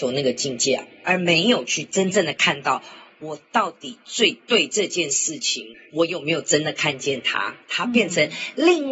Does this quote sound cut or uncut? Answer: uncut